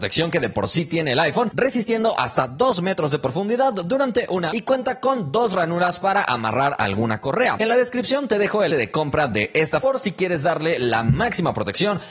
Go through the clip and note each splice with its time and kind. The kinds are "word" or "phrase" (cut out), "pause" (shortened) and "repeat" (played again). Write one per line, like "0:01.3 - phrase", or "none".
0:04.5 - word
0:08.7 - word
0:09.8 - word